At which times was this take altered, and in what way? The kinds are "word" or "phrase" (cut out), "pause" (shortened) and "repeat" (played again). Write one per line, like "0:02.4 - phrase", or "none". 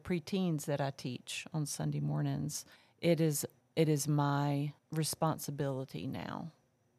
0:02.8 - pause
0:03.6 - pause
0:04.8 - pause